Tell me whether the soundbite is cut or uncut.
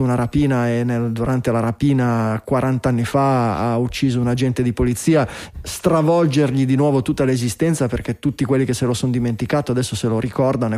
cut